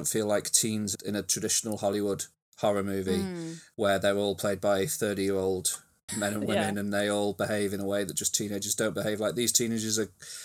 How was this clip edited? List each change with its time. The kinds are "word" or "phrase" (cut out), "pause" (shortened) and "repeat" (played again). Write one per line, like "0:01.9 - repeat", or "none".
0:00.9 - phrase
0:06.1 - word